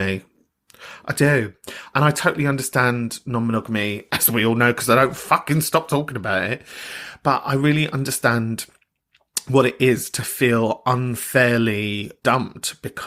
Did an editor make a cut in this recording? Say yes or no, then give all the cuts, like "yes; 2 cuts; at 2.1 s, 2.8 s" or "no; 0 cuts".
no; 0 cuts